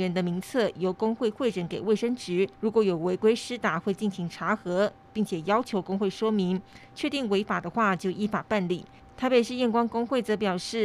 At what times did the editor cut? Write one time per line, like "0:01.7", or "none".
0:02.5